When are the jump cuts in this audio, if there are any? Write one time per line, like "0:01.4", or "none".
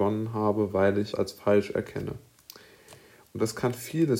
0:01.1